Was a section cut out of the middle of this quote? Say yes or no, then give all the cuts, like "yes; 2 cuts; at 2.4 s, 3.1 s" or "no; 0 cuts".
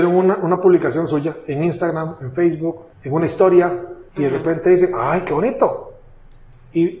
yes; 2 cuts; at 2.9 s, 4.1 s